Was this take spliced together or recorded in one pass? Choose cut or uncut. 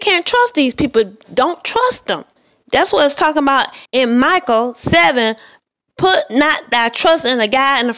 cut